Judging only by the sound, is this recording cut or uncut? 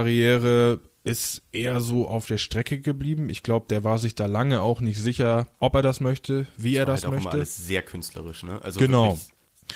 cut